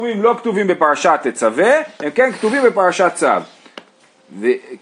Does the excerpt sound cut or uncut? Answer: uncut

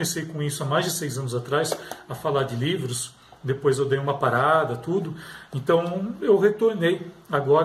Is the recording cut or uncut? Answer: uncut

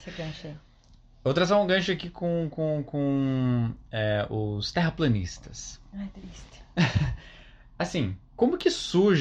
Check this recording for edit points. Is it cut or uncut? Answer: cut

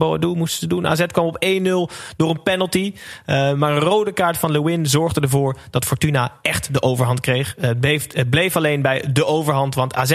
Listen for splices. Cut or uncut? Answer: uncut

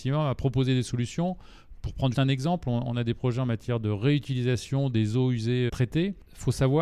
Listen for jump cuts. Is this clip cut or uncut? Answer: cut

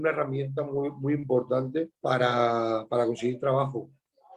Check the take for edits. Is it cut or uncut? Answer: cut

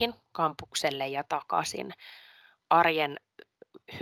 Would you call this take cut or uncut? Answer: uncut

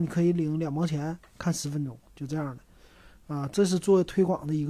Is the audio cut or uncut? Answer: uncut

